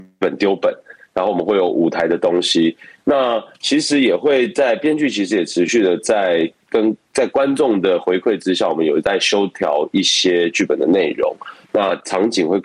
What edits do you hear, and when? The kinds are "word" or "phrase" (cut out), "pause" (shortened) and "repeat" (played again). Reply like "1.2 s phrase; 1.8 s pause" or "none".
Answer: none